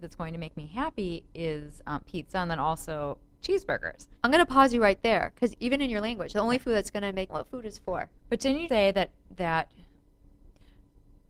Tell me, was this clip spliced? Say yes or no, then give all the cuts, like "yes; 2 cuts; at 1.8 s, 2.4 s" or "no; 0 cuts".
yes; 6 cuts; at 1.3 s, 4.2 s, 5.5 s, 7.3 s, 8.2 s, 8.7 s